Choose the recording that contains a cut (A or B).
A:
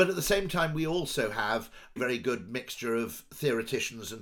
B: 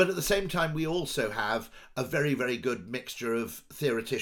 A